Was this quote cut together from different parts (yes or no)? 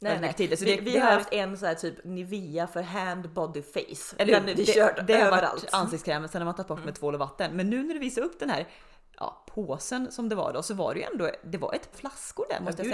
yes